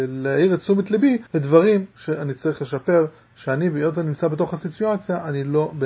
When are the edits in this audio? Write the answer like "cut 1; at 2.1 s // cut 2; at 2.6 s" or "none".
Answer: cut 1; at 1.3 s